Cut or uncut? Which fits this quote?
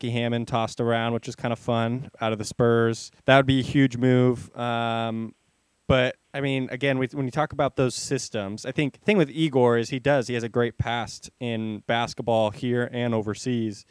cut